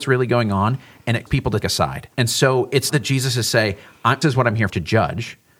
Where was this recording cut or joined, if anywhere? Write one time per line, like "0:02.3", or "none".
0:01.3
0:01.6
0:02.1
0:02.9
0:04.2
0:04.7